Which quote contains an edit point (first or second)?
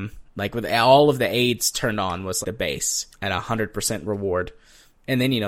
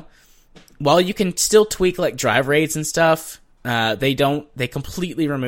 first